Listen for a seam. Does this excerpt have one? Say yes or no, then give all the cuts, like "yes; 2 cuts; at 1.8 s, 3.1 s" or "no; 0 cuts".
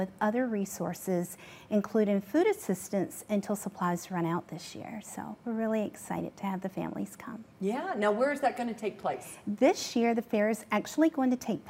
no; 0 cuts